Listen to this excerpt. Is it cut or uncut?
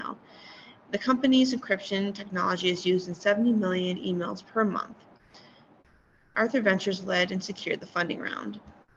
uncut